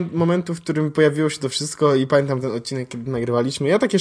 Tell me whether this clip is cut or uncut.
uncut